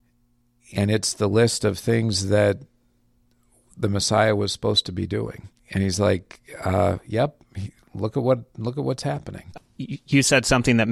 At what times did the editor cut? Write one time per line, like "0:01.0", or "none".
none